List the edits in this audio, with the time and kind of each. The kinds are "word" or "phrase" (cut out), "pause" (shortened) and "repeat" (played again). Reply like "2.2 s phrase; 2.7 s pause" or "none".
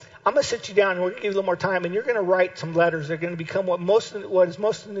none